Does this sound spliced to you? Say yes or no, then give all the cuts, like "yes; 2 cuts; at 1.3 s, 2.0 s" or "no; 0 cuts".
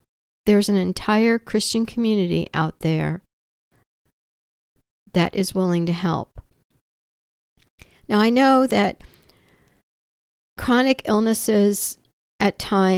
no; 0 cuts